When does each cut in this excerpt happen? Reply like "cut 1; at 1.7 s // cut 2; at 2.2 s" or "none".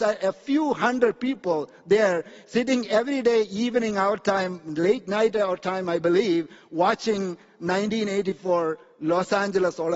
none